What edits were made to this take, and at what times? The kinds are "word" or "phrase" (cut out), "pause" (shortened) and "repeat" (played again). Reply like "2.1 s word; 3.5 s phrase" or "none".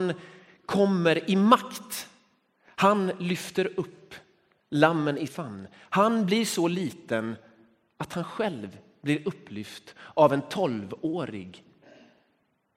5.3 s word